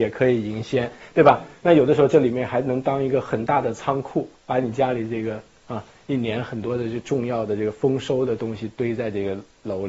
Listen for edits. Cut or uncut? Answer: cut